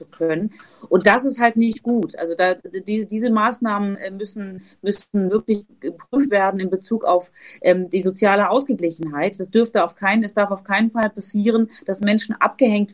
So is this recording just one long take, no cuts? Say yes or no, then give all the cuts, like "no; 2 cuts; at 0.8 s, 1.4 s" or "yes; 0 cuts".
yes; 0 cuts